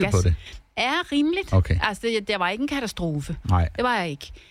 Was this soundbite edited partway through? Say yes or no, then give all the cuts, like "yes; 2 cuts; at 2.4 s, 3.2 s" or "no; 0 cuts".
no; 0 cuts